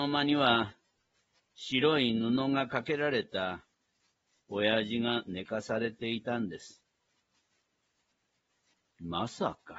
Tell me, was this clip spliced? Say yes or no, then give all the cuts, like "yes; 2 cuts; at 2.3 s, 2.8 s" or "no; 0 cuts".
no; 0 cuts